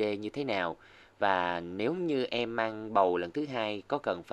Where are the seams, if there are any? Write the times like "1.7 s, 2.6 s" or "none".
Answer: none